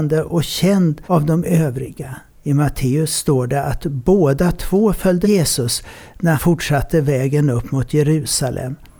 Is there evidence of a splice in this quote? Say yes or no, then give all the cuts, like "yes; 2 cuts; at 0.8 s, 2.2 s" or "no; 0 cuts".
yes; 4 cuts; at 1.0 s, 2.3 s, 5.2 s, 6.4 s